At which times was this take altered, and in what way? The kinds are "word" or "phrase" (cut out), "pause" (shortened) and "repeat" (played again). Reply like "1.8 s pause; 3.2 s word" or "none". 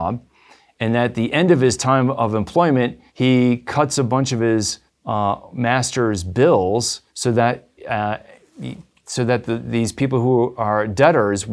3.1 s pause; 4.9 s pause; 7.1 s pause; 7.8 s pause